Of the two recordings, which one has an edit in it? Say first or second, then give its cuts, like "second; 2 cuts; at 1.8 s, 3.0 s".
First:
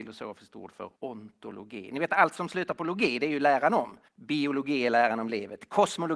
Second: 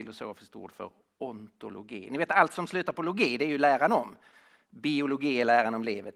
first; 2 cuts; at 1.0 s, 4.1 s